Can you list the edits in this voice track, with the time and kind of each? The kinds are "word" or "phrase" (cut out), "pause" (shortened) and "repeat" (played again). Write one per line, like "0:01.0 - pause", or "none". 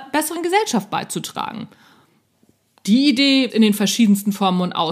0:03.5 - word